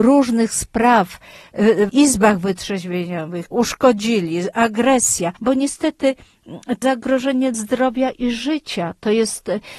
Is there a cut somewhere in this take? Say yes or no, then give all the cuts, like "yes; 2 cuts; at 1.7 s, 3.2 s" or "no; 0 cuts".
yes; 5 cuts; at 1.9 s, 3.5 s, 5.4 s, 6.8 s, 7.5 s